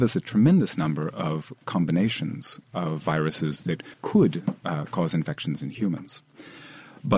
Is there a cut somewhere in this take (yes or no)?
yes